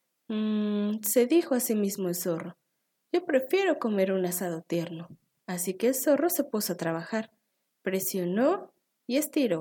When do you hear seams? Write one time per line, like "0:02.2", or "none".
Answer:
none